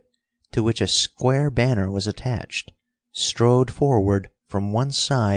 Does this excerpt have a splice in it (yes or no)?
no